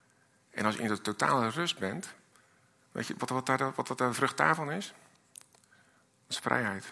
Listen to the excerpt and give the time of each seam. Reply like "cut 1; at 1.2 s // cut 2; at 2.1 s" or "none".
none